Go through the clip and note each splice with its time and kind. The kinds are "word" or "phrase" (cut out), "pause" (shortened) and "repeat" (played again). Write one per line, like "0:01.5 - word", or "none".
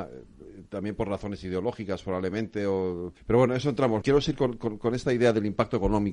0:03.2 - pause
0:04.0 - phrase

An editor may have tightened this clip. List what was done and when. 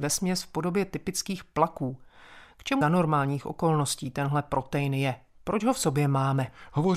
0:02.8 - phrase

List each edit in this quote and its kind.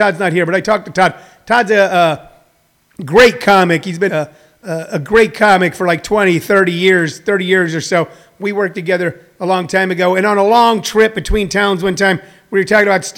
0:04.1 - word

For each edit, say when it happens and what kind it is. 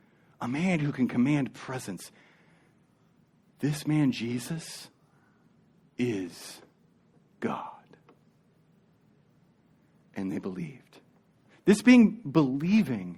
0:07.1 - pause

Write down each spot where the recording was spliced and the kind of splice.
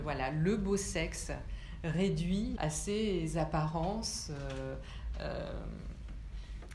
0:02.6 - word

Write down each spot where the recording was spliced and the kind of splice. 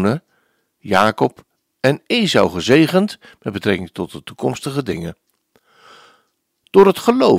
none

